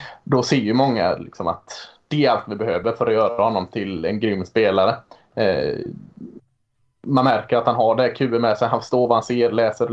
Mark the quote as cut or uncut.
uncut